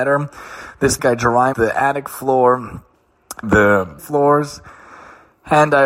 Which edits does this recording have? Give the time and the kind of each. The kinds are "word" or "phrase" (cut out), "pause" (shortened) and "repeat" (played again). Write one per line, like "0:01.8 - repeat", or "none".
0:01.0 - phrase
0:01.5 - word
0:03.4 - word
0:04.0 - word